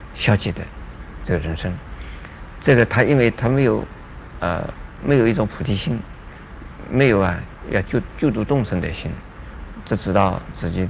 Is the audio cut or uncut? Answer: uncut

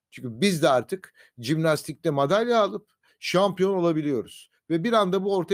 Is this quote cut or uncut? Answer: uncut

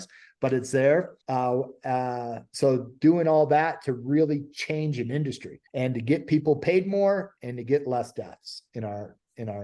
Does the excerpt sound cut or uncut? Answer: cut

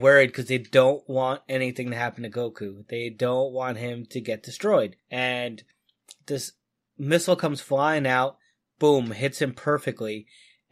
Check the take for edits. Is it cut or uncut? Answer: uncut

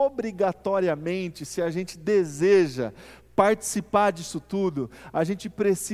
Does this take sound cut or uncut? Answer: uncut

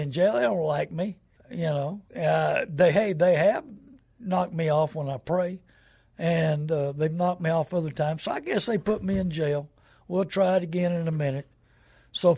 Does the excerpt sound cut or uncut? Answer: cut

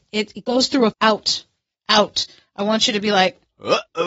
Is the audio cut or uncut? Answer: cut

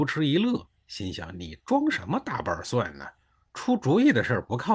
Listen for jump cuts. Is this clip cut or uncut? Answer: uncut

